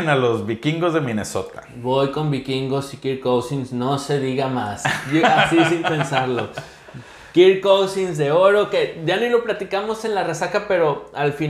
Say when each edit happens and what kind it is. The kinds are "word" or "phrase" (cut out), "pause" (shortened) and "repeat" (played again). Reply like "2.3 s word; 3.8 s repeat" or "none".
none